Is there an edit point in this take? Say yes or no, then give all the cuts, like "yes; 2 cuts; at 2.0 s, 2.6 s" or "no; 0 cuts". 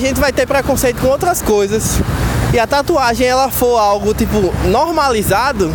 no; 0 cuts